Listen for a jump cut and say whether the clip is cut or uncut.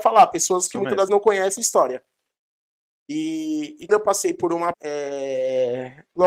cut